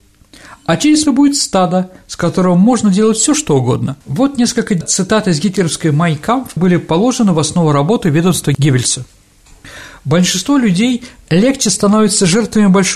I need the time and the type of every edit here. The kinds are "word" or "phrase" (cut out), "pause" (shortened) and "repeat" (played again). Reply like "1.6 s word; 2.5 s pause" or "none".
1.1 s phrase; 4.0 s pause; 6.6 s word